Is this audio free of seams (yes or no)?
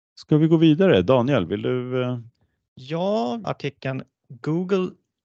no